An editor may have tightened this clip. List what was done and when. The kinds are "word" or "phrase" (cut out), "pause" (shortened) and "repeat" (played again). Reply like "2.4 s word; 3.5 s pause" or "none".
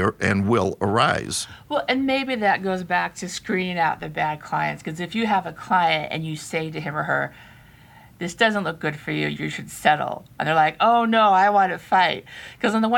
none